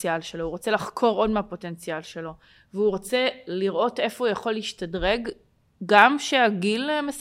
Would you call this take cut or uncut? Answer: uncut